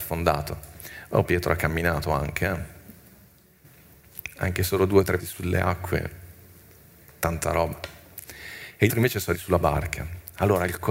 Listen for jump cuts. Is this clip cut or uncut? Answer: cut